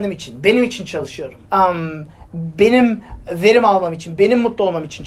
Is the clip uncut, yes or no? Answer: no